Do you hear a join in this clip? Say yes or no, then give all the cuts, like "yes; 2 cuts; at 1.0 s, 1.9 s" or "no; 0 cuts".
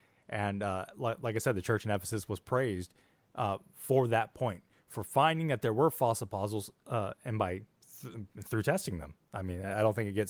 no; 0 cuts